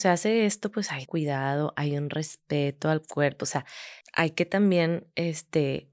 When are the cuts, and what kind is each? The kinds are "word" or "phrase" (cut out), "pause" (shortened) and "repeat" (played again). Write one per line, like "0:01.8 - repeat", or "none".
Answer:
0:01.1 - word
0:04.0 - pause